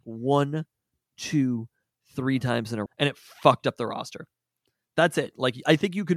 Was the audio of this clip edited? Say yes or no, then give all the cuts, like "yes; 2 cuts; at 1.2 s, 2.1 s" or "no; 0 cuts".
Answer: yes; 1 cut; at 2.9 s